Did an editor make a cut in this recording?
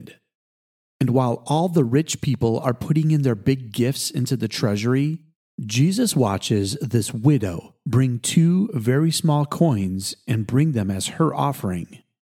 no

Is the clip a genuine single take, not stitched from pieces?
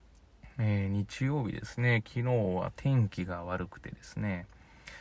yes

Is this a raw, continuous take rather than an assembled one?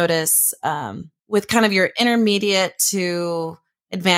no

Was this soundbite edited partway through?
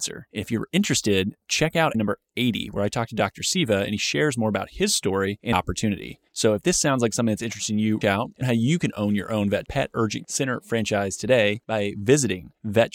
yes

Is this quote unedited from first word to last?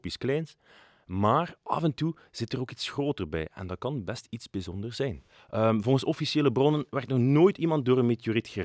yes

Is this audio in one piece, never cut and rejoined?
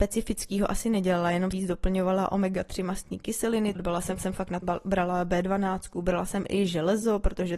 no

